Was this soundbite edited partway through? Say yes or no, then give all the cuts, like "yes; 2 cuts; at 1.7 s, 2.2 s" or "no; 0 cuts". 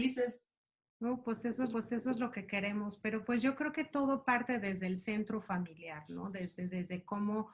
yes; 1 cut; at 1.7 s